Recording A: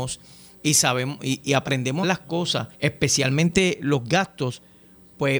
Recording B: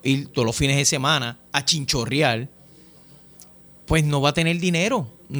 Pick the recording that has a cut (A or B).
A